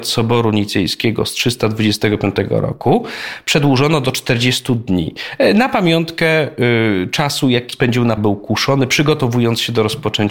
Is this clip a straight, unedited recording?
no; 2 cuts; at 7.7 s, 8.2 s

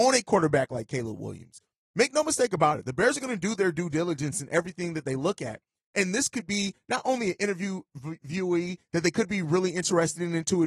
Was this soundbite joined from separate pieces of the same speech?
no; 0 cuts

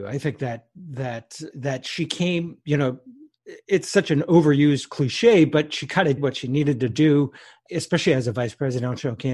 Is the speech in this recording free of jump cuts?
no; 3 cuts; at 1.5 s, 6.2 s, 7.7 s

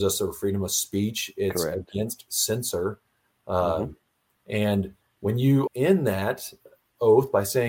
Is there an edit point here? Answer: yes; 1 cut; at 5.7 s

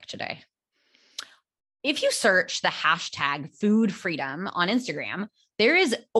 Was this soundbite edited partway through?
no; 0 cuts

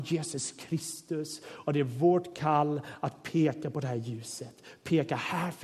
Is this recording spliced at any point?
no; 0 cuts

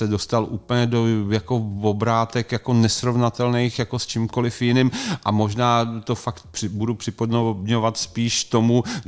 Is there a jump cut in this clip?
no; 0 cuts

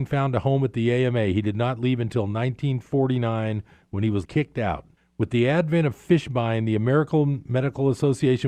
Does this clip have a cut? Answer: yes; 2 cuts; at 4.2 s, 5.0 s

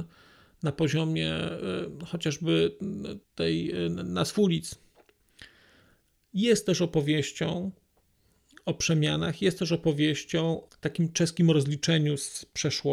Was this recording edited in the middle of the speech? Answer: yes; 2 cuts; at 3.2 s, 10.7 s

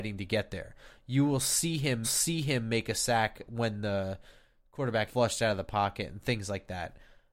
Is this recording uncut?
no; 2 cuts; at 2.0 s, 5.1 s

